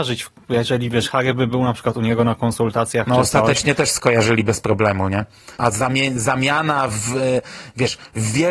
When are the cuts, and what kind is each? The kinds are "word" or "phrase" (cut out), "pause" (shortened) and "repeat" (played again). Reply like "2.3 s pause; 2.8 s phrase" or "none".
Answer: 5.5 s pause